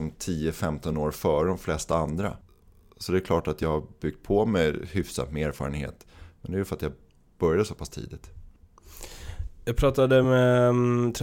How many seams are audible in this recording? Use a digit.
0